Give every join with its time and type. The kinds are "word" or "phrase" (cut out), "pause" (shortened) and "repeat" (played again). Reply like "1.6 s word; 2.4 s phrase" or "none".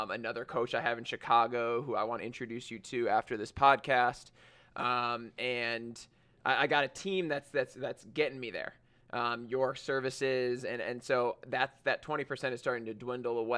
none

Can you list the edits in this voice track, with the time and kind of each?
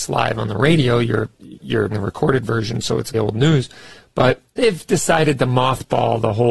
1.9 s word; 3.1 s phrase

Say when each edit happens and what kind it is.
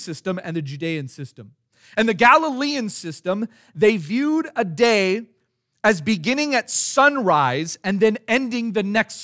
none

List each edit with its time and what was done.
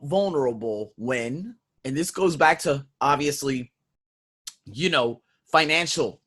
1.7 s pause

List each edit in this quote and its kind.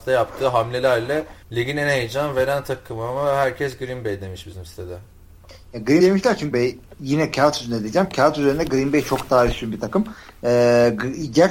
1.4 s pause; 6.0 s word; 6.5 s phrase

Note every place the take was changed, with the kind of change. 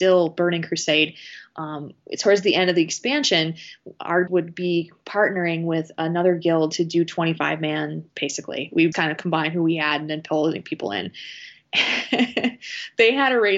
4.3 s word; 8.1 s word; 8.9 s word

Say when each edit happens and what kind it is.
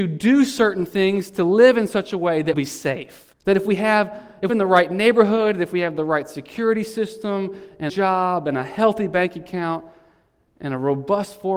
2.5 s word; 3.3 s pause; 4.5 s phrase; 7.9 s phrase

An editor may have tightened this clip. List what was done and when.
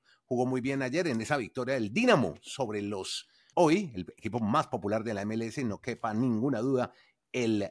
3.5 s word

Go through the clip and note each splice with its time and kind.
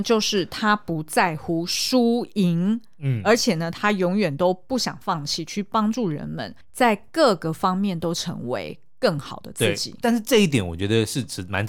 6.6 s pause

